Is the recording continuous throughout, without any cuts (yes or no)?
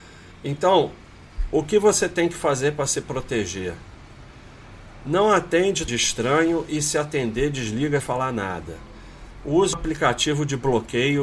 no